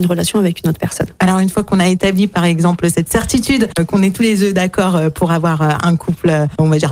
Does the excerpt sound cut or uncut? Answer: uncut